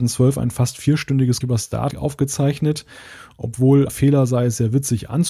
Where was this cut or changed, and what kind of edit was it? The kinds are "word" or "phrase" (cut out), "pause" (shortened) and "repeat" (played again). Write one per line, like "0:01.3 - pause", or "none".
0:01.4 - word
0:01.9 - word
0:03.9 - word